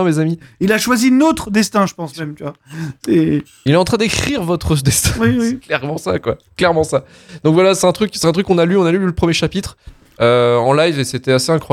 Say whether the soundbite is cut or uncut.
uncut